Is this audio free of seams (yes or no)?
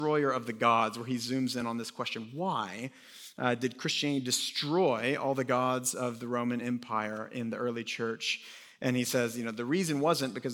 yes